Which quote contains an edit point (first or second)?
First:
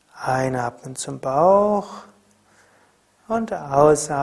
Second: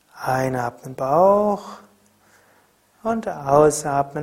second